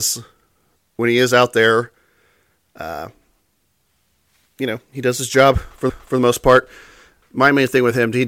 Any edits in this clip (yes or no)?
yes